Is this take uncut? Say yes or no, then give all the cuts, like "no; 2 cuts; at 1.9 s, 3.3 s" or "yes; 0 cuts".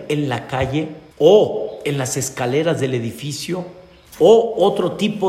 no; 1 cut; at 1.1 s